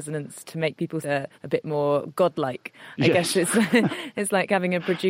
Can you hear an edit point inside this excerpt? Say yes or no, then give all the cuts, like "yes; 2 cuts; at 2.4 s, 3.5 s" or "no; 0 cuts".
yes; 2 cuts; at 1.0 s, 1.3 s